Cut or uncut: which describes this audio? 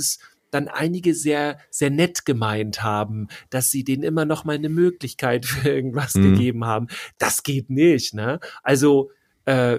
uncut